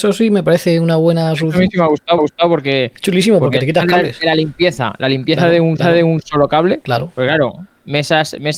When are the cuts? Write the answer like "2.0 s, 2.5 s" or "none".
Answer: 2.2 s, 5.8 s